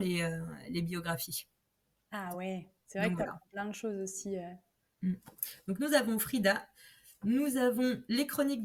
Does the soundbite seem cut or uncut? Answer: uncut